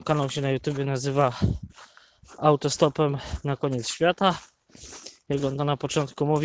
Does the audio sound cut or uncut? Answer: uncut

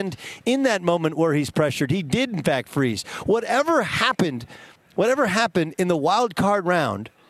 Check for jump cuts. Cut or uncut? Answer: cut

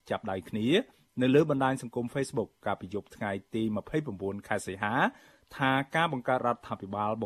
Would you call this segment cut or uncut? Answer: uncut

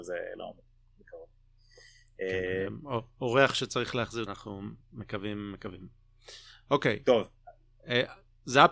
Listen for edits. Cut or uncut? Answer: cut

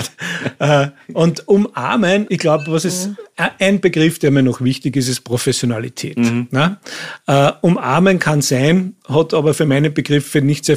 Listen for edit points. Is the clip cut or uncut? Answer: cut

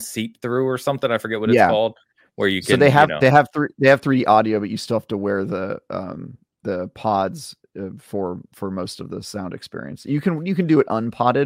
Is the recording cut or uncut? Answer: uncut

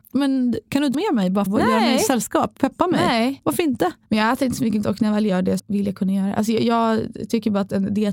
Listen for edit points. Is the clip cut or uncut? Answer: cut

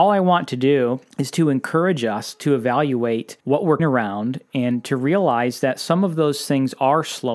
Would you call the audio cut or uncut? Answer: cut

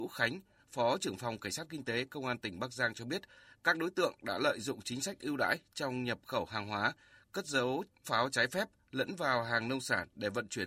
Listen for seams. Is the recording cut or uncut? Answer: uncut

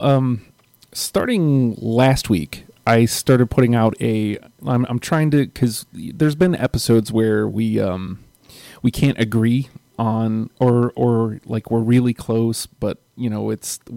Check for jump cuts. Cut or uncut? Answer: uncut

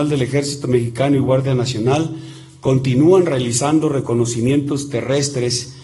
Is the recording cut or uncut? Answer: uncut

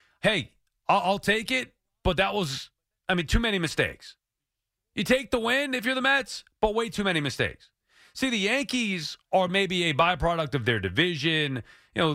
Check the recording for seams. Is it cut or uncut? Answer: uncut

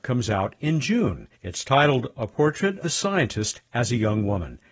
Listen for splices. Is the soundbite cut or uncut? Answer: cut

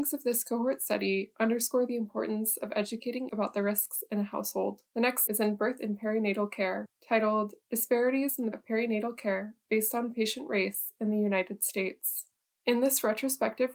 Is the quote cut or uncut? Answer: cut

